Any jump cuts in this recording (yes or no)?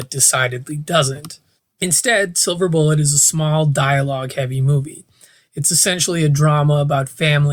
no